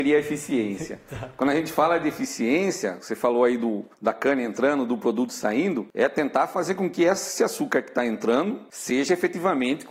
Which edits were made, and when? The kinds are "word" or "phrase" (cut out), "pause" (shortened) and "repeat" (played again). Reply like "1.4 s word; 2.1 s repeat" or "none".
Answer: 3.9 s pause